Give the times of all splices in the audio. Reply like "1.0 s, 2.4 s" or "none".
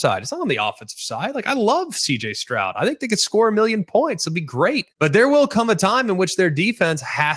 4.9 s